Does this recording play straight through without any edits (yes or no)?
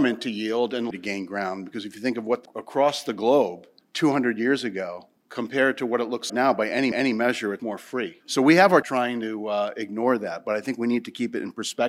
no